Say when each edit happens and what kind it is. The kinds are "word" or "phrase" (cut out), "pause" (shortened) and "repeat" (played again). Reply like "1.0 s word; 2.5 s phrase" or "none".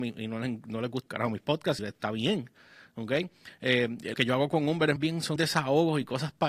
1.1 s word; 1.8 s word; 4.1 s word; 5.0 s word; 5.4 s word